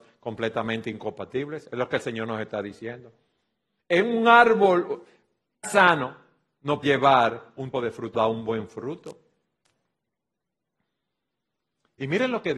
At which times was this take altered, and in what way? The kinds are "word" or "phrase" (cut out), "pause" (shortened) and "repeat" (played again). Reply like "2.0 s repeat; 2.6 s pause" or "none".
5.6 s word; 6.8 s word; 7.7 s word; 8.1 s word